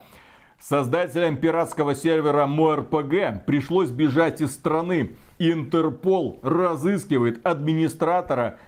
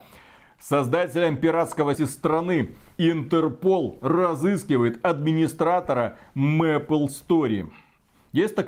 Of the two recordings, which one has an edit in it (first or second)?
second